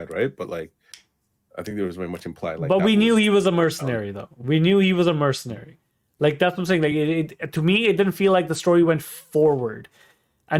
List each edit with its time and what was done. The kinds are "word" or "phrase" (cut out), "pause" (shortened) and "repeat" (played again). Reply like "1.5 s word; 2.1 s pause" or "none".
none